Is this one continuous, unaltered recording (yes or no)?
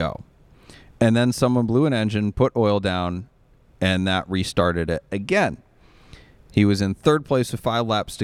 yes